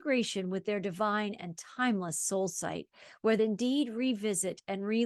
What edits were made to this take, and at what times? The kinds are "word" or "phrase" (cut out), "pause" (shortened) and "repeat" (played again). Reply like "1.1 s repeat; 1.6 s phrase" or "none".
3.4 s phrase